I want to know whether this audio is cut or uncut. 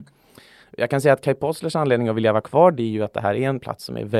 uncut